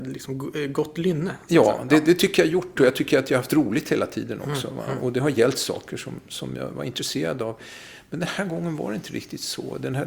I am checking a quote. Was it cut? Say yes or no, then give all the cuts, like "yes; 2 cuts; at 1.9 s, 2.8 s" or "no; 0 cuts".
no; 0 cuts